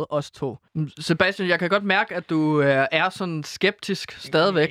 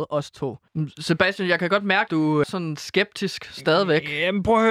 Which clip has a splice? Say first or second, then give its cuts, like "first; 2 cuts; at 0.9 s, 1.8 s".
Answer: second; 2 cuts; at 2.1 s, 2.4 s